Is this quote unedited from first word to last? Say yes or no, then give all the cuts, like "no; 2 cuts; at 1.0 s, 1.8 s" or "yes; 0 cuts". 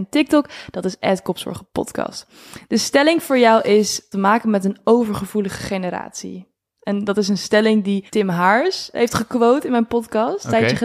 no; 3 cuts; at 4.1 s, 8.1 s, 8.9 s